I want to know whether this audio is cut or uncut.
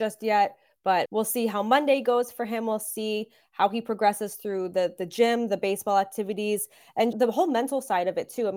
cut